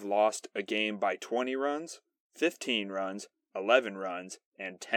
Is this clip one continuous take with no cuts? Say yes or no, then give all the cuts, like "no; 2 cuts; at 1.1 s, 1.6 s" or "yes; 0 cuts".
yes; 0 cuts